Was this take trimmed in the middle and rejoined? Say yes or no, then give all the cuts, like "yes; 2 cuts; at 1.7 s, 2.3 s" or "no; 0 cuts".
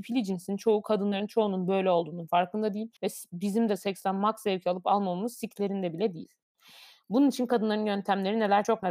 yes; 1 cut; at 3.0 s